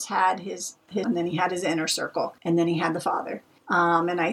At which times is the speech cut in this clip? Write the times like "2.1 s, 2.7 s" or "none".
1.0 s, 2.4 s